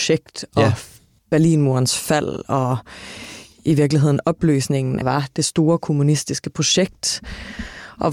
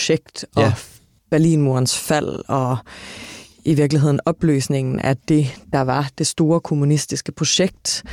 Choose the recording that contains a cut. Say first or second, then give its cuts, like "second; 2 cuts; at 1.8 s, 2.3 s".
first; 1 cut; at 5.0 s